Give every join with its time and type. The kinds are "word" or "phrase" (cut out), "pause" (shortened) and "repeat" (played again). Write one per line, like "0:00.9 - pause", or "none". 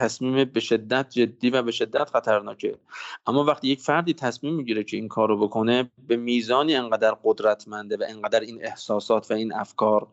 none